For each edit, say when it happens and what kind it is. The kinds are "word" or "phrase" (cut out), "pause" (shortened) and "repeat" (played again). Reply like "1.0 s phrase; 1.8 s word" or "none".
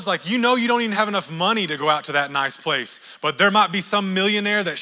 none